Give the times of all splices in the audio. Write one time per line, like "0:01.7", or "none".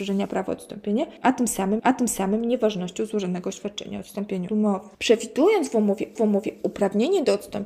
0:01.8
0:04.5
0:04.9
0:06.2